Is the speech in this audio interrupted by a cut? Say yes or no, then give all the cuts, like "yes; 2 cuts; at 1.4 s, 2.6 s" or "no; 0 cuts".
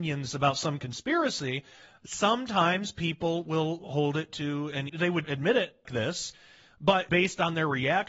yes; 4 cuts; at 4.9 s, 5.2 s, 5.8 s, 7.1 s